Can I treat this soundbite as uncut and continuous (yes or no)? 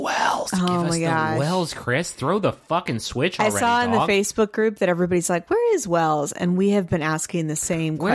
yes